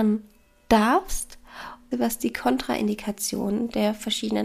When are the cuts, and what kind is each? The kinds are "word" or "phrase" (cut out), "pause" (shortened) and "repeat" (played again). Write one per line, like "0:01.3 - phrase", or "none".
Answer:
0:01.9 - word